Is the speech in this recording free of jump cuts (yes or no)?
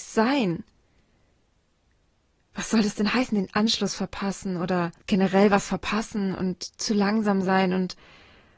no